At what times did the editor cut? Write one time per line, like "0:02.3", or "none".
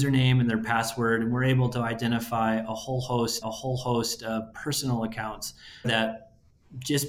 0:03.4
0:05.8